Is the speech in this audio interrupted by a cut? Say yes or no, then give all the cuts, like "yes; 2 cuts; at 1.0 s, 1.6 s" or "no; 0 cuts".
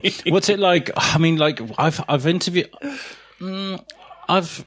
no; 0 cuts